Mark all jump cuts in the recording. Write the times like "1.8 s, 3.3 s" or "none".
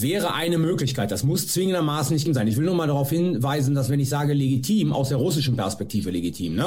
2.3 s